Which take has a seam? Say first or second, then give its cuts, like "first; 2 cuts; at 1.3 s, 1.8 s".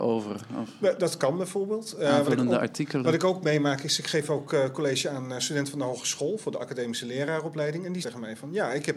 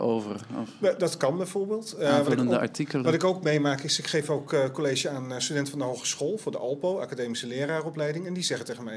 first; 2 cuts; at 6.6 s, 8.0 s